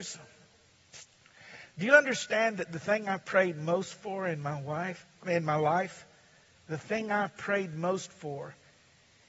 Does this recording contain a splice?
no; 0 cuts

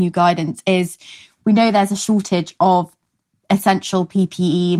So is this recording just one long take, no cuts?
yes; 0 cuts

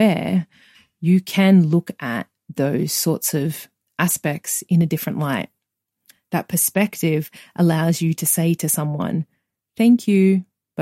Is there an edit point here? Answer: no; 0 cuts

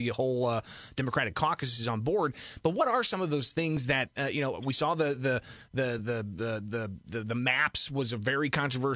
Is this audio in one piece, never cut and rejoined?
yes; 0 cuts

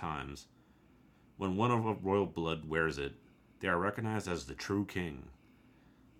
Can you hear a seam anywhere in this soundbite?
no; 0 cuts

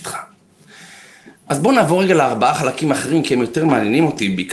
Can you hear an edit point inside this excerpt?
no; 0 cuts

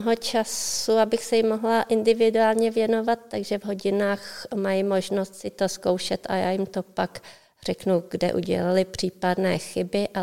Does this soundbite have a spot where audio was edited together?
no; 0 cuts

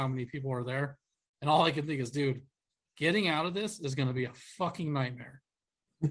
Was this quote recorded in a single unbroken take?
yes; 0 cuts

